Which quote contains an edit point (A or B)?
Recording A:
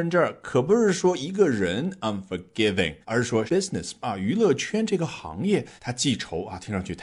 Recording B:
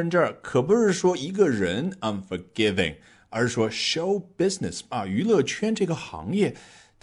A